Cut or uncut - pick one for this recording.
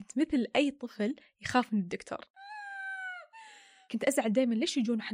uncut